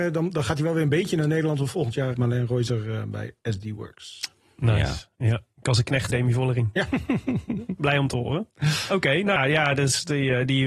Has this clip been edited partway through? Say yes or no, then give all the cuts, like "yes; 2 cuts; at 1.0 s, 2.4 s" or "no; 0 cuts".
yes; 3 cuts; at 2.1 s, 6.1 s, 9.4 s